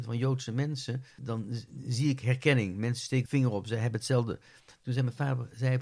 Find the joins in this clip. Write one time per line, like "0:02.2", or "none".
0:01.2
0:03.3

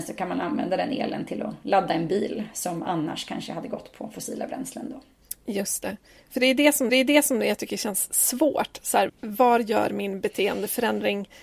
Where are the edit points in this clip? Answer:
0:05.8
0:06.9
0:09.1

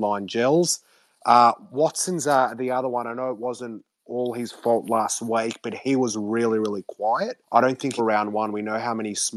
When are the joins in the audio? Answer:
0:07.4
0:08.0

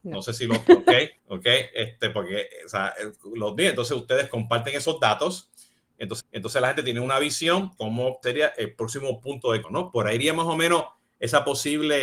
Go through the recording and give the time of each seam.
0:01.2
0:06.2
0:07.8
0:08.2
0:09.6

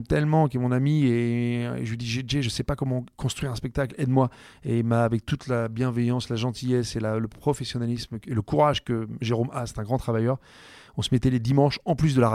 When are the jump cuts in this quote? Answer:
0:08.2

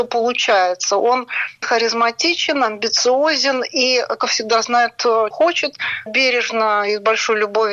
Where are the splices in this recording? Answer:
0:01.6
0:04.2
0:05.3
0:06.1

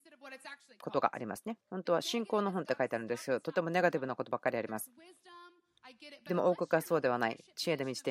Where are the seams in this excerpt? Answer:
0:01.6

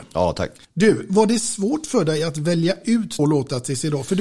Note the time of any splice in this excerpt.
0:03.2

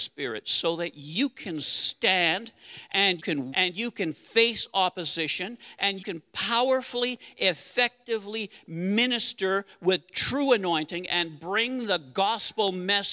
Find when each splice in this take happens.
0:03.2
0:03.5
0:06.0

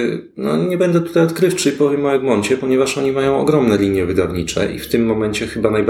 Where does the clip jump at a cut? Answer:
none

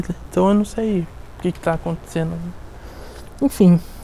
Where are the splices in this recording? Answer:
none

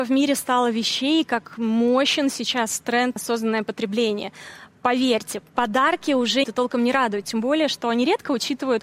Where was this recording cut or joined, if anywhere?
0:03.2
0:05.5
0:06.4

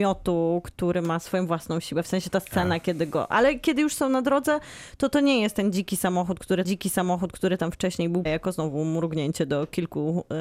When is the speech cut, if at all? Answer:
0:06.6
0:08.3

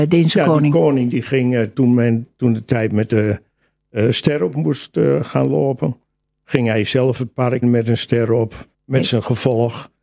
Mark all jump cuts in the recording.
0:01.7
0:07.6
0:08.7

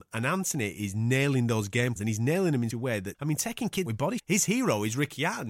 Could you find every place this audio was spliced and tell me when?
0:02.0
0:02.7
0:03.1
0:03.9
0:04.2

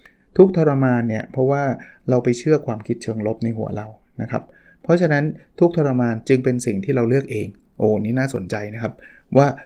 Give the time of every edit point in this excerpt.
none

